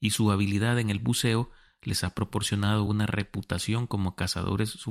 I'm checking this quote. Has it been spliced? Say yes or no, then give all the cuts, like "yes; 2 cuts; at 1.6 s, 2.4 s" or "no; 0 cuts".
no; 0 cuts